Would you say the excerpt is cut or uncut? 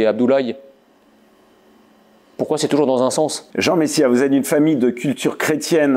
cut